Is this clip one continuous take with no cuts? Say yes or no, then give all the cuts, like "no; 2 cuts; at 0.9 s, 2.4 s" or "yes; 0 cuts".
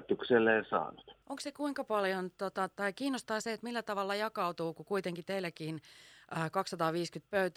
no; 1 cut; at 1.2 s